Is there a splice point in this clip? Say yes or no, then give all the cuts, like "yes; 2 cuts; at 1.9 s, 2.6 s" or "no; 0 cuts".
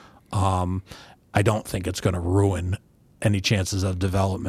no; 0 cuts